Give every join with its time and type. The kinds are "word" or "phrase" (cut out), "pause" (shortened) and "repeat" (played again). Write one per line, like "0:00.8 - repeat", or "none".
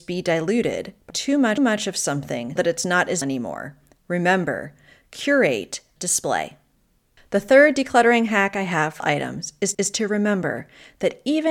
0:01.1 - word
0:01.6 - repeat
0:02.6 - word
0:03.2 - word
0:06.0 - word
0:09.0 - word
0:09.7 - repeat